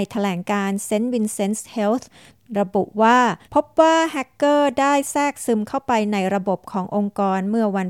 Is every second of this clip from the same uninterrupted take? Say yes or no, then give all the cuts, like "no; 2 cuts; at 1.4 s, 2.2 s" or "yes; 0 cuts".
no; 1 cut; at 3.4 s